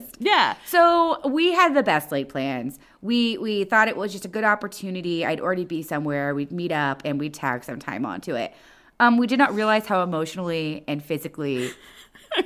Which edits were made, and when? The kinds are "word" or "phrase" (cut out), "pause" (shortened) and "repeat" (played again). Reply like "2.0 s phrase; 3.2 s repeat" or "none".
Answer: none